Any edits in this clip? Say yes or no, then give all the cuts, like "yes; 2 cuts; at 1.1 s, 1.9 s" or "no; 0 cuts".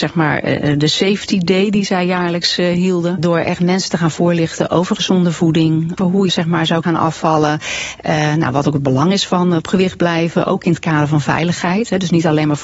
yes; 3 cuts; at 6.0 s, 6.3 s, 6.8 s